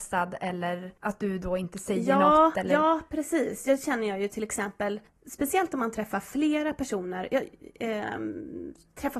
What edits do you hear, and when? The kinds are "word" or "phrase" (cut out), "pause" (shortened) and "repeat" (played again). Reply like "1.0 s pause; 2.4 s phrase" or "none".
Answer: 1.0 s pause; 5.1 s pause